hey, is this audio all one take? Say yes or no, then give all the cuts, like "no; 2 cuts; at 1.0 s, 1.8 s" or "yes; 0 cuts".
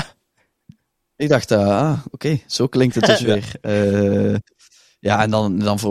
yes; 0 cuts